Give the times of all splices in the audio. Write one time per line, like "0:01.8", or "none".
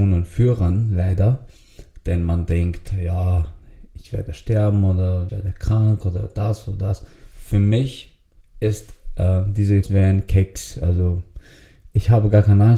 0:05.3
0:08.4
0:09.8